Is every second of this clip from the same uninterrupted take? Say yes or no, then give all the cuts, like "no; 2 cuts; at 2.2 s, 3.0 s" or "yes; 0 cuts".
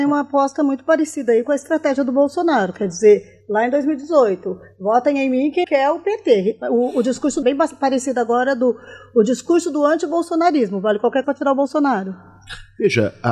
no; 3 cuts; at 5.6 s, 7.4 s, 11.2 s